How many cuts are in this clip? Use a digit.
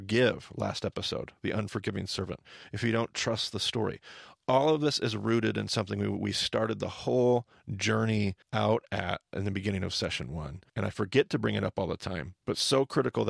3